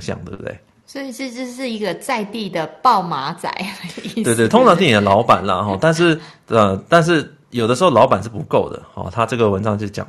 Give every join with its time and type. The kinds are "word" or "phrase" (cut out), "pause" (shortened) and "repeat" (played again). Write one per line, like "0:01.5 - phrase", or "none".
0:04.5 - phrase